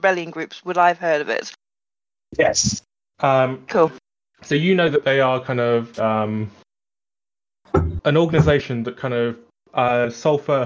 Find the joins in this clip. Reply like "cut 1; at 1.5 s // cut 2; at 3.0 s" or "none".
cut 1; at 6.0 s